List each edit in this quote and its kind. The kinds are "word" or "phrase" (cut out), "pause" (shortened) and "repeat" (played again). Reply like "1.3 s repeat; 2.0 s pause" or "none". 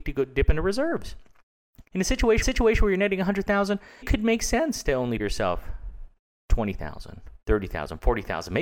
1.9 s pause; 2.4 s repeat; 4.0 s word; 5.2 s word; 7.4 s pause